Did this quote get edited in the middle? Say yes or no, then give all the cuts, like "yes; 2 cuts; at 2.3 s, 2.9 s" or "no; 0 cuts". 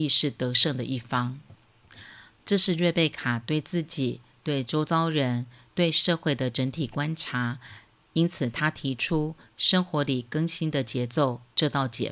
no; 0 cuts